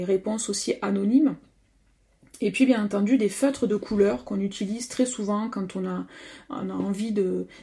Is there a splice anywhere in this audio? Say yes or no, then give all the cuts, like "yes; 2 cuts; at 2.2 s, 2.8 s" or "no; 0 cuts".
no; 0 cuts